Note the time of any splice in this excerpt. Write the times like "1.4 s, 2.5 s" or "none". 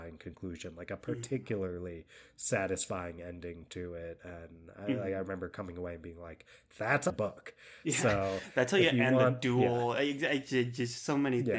7.1 s